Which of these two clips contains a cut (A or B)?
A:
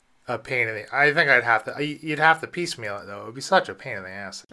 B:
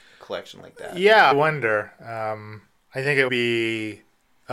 B